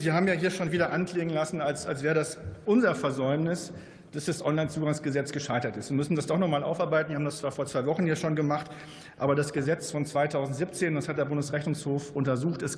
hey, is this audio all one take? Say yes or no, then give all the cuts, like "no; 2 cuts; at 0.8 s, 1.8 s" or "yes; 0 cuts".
yes; 0 cuts